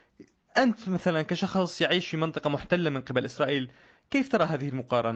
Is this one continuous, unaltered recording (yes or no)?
yes